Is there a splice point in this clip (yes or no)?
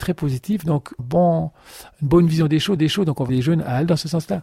yes